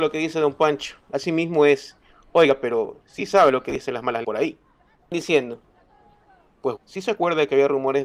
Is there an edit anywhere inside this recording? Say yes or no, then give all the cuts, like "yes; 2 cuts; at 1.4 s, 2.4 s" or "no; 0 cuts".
yes; 3 cuts; at 4.2 s, 5.1 s, 6.8 s